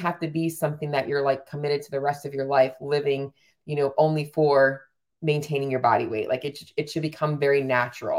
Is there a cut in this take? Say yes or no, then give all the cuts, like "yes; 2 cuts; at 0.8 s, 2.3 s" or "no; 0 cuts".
no; 0 cuts